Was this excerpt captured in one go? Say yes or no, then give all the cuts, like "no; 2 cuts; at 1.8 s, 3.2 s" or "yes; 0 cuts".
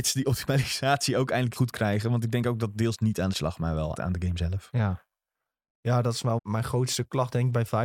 no; 4 cuts; at 1.6 s, 3.3 s, 3.9 s, 6.4 s